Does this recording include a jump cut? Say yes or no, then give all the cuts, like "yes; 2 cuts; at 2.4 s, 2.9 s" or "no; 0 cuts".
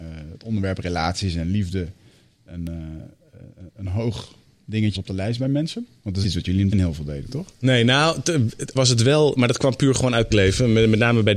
yes; 6 cuts; at 3.7 s, 4.9 s, 6.2 s, 6.7 s, 8.8 s, 10.3 s